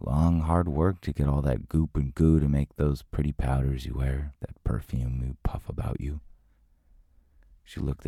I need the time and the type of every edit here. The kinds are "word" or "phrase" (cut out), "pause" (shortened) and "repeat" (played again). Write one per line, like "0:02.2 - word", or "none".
0:04.4 - pause

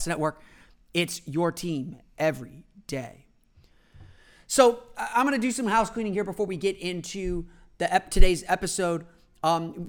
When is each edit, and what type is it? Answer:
none

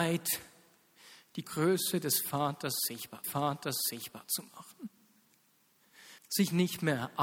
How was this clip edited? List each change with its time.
0:01.4 - phrase
0:03.2 - repeat
0:06.2 - pause

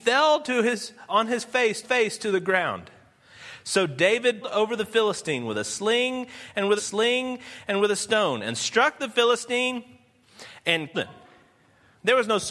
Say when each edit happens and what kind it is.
0:01.1 - word
0:01.8 - repeat
0:04.4 - word
0:06.8 - repeat
0:10.9 - word

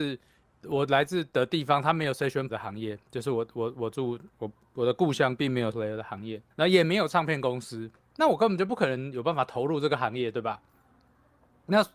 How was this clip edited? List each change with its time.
0:02.5 - word
0:04.3 - pause
0:05.7 - word
0:06.5 - pause

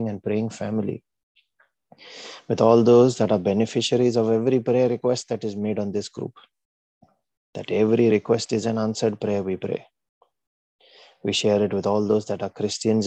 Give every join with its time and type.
none

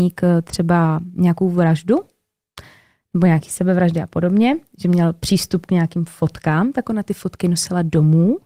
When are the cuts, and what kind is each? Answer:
none

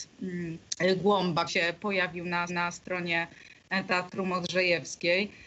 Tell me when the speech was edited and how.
0:01.5 - word
0:02.5 - repeat

